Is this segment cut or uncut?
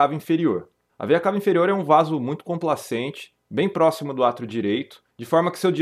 uncut